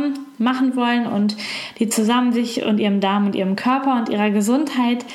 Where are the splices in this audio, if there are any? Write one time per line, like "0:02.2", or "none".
none